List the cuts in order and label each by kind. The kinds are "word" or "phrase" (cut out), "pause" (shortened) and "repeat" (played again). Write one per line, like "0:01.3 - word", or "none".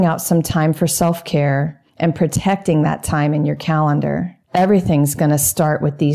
0:01.9 - pause
0:04.4 - pause